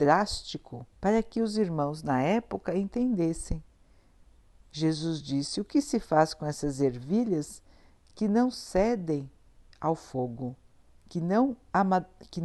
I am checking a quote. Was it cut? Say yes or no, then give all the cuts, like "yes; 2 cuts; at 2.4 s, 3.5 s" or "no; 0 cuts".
yes; 1 cut; at 0.9 s